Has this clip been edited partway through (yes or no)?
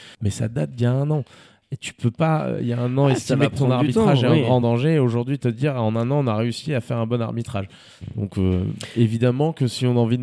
no